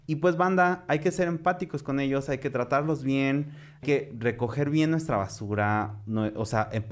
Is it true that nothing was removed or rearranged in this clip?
no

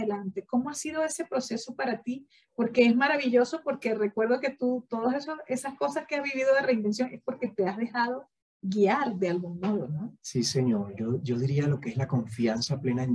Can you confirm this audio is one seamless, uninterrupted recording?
yes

